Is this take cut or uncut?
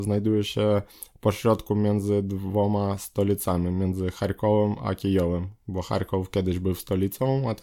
uncut